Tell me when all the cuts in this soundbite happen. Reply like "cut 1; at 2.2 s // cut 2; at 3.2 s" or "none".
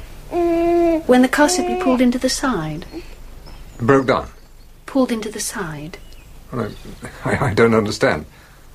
cut 1; at 4.7 s